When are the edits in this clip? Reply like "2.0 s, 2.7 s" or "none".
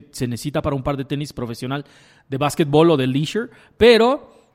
none